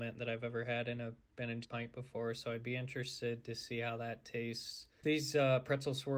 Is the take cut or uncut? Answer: cut